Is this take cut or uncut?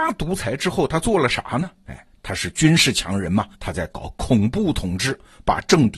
cut